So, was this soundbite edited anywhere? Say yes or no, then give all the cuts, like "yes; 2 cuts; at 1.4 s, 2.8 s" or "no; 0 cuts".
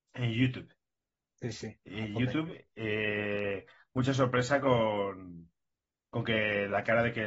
no; 0 cuts